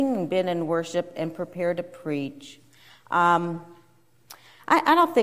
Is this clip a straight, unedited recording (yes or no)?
yes